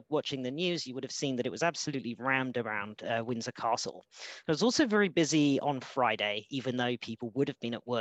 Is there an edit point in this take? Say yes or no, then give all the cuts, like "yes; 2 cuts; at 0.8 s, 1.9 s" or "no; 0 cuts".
no; 0 cuts